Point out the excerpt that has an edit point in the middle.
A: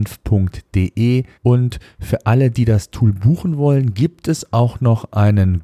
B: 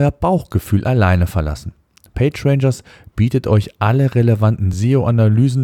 A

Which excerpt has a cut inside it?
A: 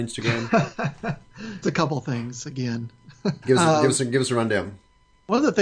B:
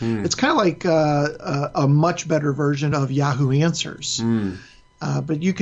A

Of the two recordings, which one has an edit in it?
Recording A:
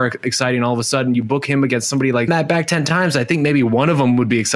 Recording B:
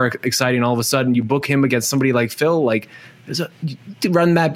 A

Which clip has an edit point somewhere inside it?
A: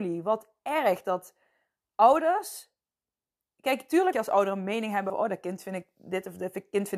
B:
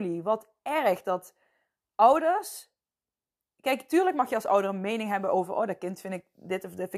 A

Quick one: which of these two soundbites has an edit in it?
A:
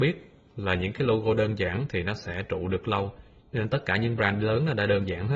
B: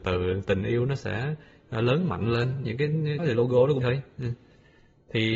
B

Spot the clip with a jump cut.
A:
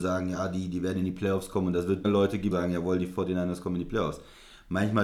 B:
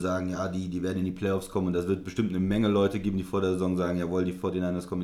A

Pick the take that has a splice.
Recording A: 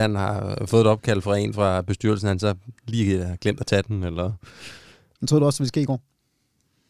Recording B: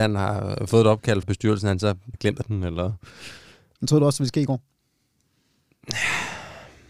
B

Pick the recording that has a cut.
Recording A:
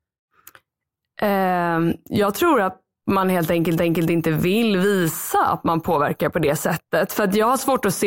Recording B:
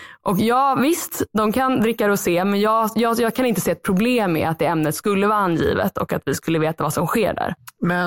A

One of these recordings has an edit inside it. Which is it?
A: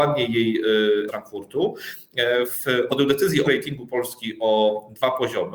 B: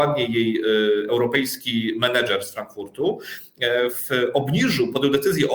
A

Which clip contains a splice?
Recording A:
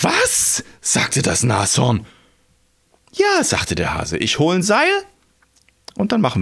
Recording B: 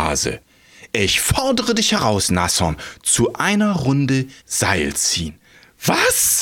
B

